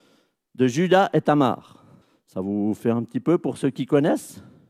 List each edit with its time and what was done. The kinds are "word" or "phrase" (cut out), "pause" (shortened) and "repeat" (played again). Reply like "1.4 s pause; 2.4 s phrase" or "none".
2.0 s pause